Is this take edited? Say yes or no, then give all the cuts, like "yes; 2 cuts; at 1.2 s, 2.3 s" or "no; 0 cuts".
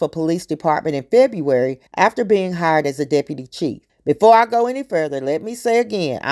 yes; 2 cuts; at 1.9 s, 3.9 s